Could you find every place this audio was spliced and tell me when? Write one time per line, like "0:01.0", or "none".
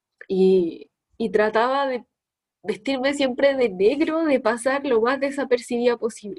none